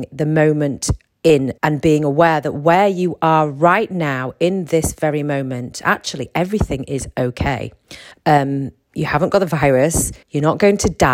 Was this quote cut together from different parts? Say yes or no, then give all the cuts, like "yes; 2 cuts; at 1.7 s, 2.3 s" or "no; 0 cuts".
yes; 3 cuts; at 1.6 s, 8.1 s, 10.2 s